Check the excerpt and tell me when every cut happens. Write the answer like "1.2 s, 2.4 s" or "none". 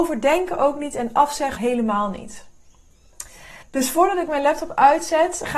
1.6 s, 3.6 s

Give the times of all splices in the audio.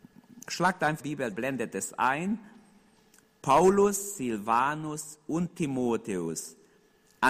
1.0 s, 1.3 s

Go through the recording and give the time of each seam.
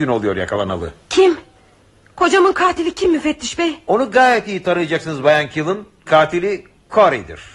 1.0 s, 6.1 s

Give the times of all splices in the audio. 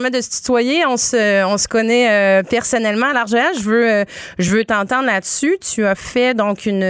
none

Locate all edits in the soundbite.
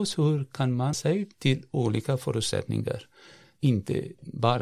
0.9 s, 1.3 s

